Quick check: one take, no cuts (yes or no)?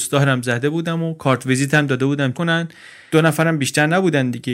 no